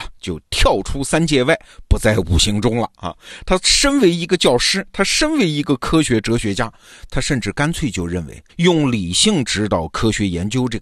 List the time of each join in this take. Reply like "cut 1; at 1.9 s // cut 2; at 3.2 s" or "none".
cut 1; at 8.5 s